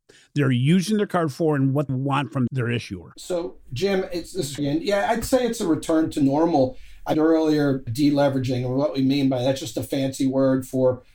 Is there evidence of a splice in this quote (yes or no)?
yes